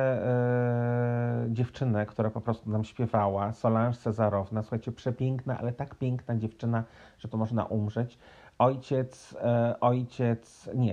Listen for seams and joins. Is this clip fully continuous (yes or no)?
no